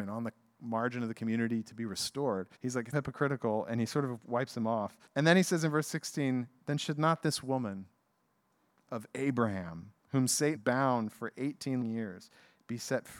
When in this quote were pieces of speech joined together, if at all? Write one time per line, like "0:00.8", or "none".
0:02.6
0:02.9
0:05.1
0:08.9
0:10.0
0:10.5
0:11.8